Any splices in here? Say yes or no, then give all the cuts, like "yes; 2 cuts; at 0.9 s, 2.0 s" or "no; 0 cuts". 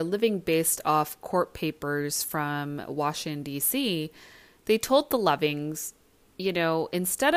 no; 0 cuts